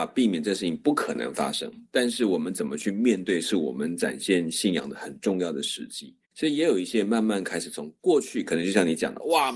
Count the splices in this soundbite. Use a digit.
1